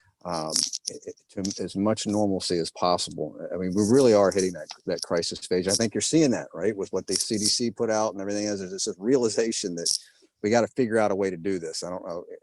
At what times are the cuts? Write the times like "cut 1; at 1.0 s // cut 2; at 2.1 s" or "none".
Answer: none